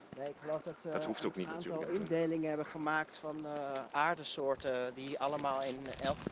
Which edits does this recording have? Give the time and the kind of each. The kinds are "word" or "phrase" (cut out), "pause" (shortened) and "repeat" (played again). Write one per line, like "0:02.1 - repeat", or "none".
0:03.9 - word